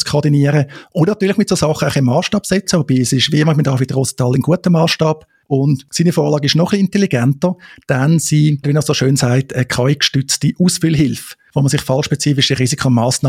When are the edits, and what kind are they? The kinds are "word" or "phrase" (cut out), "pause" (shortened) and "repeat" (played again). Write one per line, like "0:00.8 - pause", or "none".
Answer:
0:08.6 - word

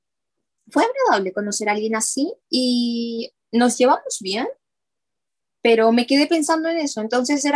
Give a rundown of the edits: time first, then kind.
0:02.4 - pause

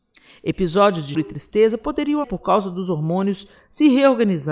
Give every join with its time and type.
0:01.1 - word
0:02.2 - word

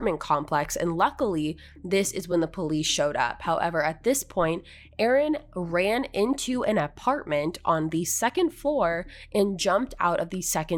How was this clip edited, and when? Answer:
none

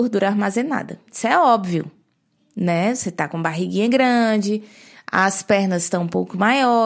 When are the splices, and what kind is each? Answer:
none

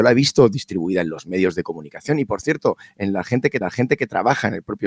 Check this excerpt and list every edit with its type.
0:03.6 - repeat

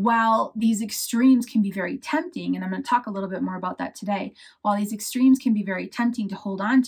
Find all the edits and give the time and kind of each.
none

